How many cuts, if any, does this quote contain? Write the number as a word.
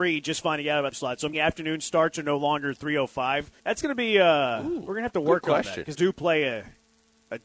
four